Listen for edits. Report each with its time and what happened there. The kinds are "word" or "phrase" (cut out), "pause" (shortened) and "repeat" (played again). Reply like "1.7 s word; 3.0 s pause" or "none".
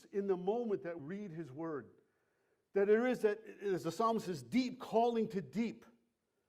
1.0 s word